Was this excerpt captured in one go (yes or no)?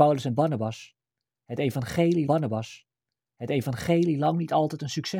no